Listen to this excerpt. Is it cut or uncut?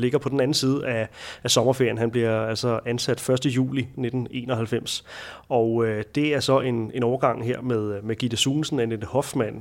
uncut